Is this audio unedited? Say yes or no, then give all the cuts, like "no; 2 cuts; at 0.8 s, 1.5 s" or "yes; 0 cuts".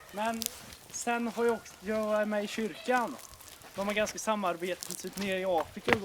no; 1 cut; at 4.1 s